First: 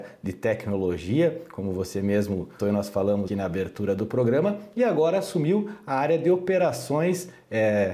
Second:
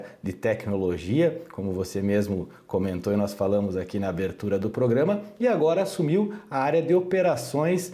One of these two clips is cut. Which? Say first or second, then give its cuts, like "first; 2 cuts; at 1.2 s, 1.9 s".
first; 2 cuts; at 2.6 s, 3.3 s